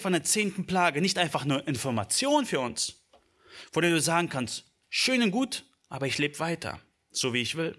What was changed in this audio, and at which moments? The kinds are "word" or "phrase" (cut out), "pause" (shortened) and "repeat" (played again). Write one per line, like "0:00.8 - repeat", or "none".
none